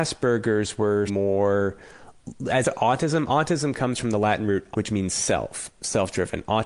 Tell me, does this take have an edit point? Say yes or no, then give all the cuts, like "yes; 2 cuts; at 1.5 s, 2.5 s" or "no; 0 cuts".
yes; 3 cuts; at 1.1 s, 2.6 s, 4.7 s